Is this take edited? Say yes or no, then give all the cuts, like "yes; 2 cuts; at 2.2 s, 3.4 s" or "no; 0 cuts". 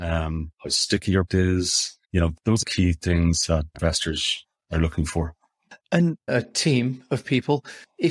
yes; 5 cuts; at 1.3 s, 2.0 s, 2.6 s, 3.7 s, 6.3 s